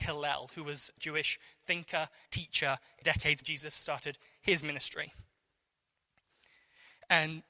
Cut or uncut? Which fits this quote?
cut